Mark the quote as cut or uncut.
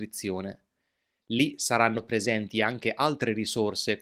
uncut